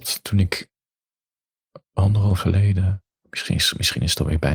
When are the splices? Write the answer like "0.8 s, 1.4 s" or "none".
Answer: 2.4 s, 3.1 s